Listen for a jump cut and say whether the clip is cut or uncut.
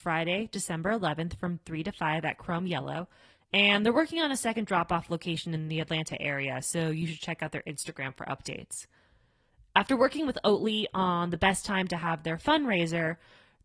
uncut